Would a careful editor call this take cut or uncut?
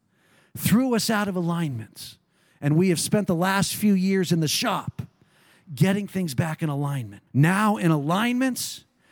cut